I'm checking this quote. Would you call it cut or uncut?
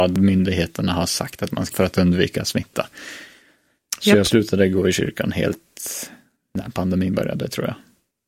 cut